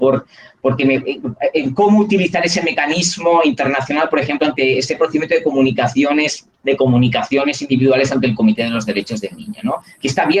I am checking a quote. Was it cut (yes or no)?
yes